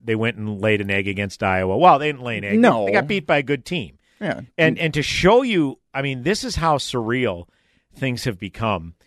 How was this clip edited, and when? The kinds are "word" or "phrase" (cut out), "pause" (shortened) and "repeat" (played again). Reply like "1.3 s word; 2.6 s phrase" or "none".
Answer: none

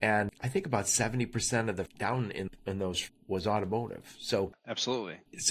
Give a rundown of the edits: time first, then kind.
1.9 s word; 2.5 s word; 3.1 s word

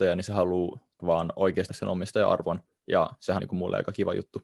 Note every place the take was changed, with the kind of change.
1.0 s word; 1.7 s word; 3.4 s word

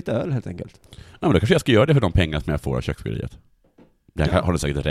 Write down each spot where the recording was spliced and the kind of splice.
none

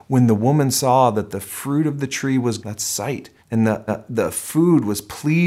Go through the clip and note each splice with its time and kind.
2.6 s word; 3.4 s pause; 3.9 s repeat

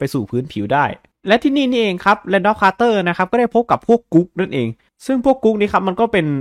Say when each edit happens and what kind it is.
none

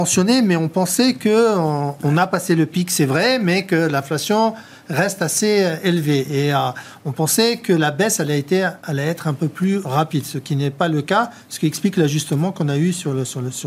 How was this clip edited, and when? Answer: 8.8 s pause

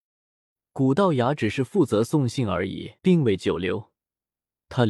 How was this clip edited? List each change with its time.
3.0 s pause

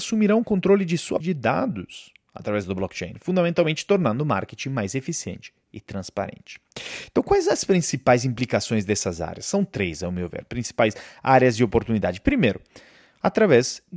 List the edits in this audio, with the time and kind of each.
1.2 s word

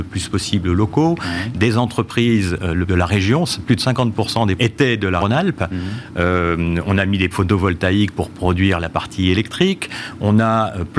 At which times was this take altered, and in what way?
2.9 s phrase; 4.6 s word; 5.2 s word; 7.3 s word

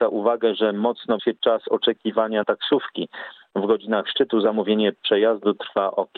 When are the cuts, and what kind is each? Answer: 1.2 s word; 2.4 s word

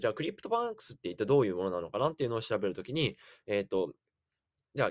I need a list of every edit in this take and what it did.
none

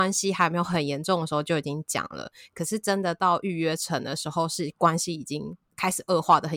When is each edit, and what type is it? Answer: none

